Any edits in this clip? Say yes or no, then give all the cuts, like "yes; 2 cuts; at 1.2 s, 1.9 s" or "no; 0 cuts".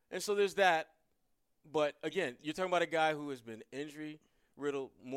no; 0 cuts